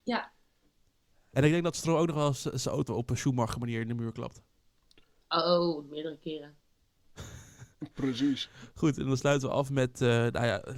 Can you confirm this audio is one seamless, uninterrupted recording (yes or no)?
no